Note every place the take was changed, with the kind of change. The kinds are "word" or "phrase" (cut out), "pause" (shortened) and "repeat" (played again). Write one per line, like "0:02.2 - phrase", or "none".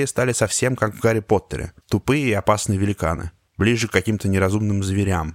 0:01.8 - pause
0:03.5 - pause